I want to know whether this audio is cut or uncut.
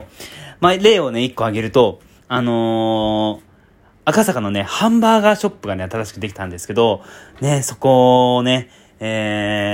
uncut